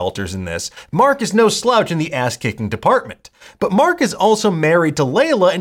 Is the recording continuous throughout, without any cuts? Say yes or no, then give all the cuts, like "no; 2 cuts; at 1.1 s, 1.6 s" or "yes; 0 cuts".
yes; 0 cuts